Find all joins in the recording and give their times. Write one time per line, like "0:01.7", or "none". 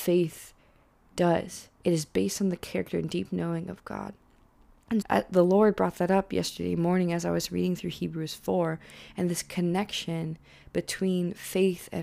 0:05.0